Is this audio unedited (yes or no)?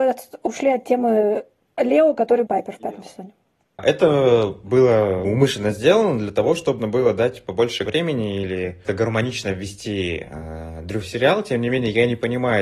no